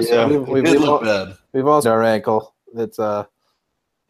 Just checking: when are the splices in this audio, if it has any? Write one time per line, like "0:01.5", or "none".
0:01.4
0:01.8